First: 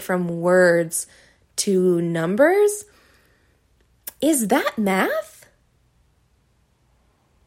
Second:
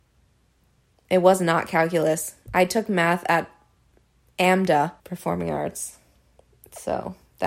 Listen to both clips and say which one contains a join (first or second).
second